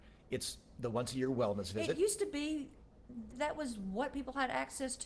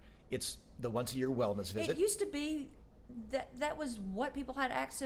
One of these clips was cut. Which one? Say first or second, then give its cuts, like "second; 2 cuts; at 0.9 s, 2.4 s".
first; 1 cut; at 3.3 s